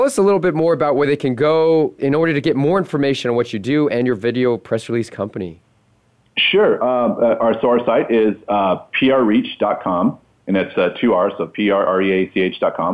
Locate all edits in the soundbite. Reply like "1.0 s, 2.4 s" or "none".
2.0 s

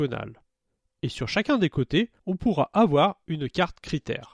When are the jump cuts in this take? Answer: 2.2 s

